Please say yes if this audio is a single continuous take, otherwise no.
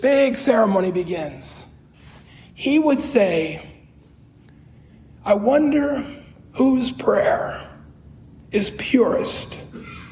yes